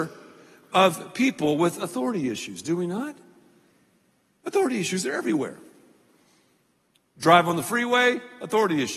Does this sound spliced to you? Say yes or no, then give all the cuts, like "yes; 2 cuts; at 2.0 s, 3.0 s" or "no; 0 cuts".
no; 0 cuts